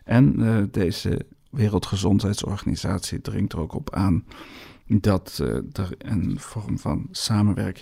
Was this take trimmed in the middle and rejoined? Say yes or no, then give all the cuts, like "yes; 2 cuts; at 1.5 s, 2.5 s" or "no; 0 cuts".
no; 0 cuts